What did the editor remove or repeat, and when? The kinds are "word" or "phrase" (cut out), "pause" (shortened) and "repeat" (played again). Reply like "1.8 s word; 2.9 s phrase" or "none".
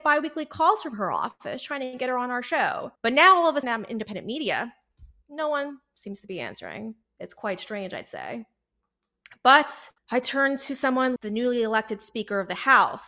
3.0 s pause; 3.6 s word; 10.0 s pause; 11.2 s word